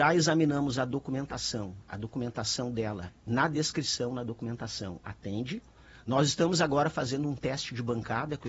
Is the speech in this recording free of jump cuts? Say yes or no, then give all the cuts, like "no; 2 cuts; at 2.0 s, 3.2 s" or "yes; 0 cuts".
yes; 0 cuts